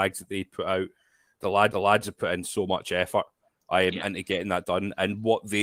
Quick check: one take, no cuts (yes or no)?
no